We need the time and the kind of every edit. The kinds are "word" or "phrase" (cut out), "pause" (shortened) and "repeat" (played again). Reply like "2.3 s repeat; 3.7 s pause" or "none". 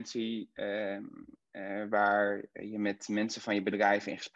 none